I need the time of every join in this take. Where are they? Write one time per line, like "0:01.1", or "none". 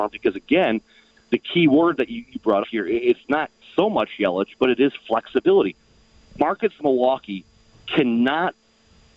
0:02.6
0:06.8